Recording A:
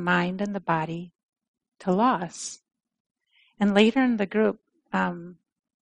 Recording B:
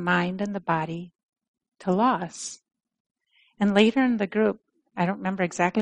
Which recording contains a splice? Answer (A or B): B